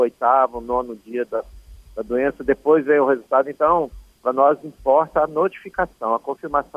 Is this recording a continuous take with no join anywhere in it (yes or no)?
yes